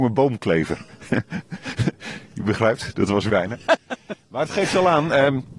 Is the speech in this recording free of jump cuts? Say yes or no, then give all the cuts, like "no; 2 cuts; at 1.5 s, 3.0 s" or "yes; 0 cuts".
no; 1 cut; at 3.3 s